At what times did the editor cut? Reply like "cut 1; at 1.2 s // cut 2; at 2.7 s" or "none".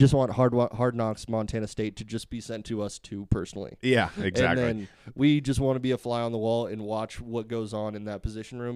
none